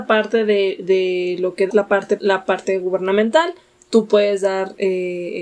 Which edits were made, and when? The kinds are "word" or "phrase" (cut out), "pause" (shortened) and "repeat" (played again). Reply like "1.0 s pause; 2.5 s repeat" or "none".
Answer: 1.7 s word; 2.2 s word